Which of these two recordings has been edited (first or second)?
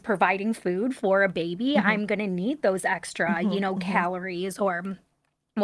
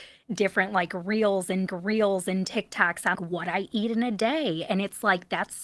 second